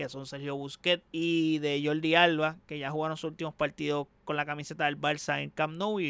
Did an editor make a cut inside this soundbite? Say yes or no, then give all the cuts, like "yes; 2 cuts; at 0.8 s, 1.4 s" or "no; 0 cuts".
yes; 2 cuts; at 1.1 s, 4.2 s